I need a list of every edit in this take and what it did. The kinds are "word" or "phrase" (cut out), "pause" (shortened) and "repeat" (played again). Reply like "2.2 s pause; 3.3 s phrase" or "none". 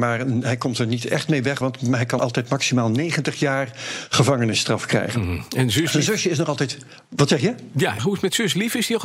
1.6 s word; 2.2 s word; 8.0 s phrase